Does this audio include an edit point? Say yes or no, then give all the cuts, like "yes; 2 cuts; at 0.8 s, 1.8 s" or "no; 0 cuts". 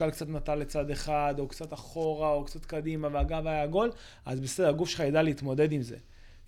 no; 0 cuts